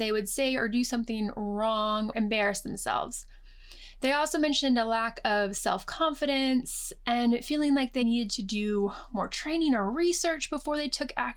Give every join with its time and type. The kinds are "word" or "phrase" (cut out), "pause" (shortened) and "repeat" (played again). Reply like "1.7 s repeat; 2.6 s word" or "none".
2.1 s word; 8.0 s word